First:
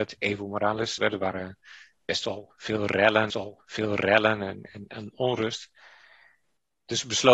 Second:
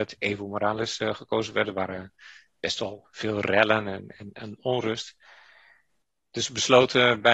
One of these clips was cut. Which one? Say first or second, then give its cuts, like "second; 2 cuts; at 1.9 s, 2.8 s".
first; 2 cuts; at 1.0 s, 3.3 s